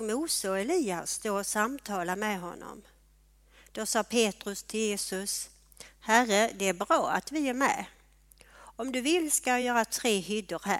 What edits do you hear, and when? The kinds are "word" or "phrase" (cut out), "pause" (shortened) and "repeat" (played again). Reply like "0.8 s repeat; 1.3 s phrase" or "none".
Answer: none